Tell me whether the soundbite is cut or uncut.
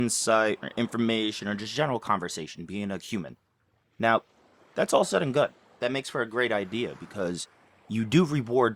uncut